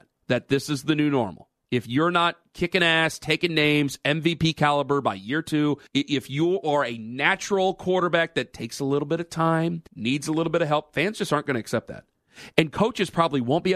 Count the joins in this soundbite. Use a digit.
2